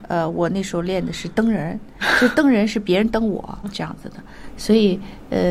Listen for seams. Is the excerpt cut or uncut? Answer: cut